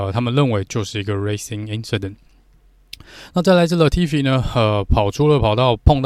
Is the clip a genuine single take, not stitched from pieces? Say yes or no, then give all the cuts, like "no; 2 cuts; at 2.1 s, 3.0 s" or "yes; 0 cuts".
yes; 0 cuts